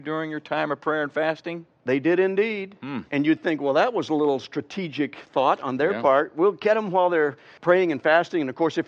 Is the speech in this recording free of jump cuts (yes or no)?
yes